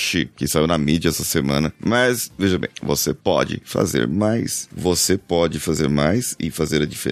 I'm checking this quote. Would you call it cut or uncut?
uncut